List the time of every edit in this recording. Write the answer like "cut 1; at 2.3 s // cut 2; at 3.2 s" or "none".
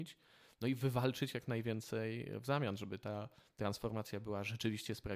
none